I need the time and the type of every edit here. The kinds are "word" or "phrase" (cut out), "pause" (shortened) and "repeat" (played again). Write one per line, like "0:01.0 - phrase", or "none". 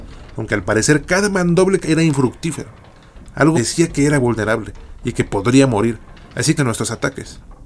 0:01.8 - word
0:03.5 - word
0:06.6 - word